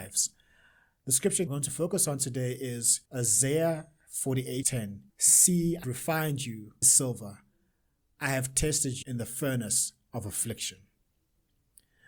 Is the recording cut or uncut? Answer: cut